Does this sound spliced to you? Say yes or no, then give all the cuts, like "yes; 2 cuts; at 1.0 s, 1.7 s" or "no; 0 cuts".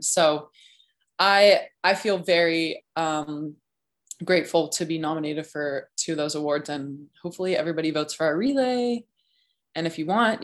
no; 0 cuts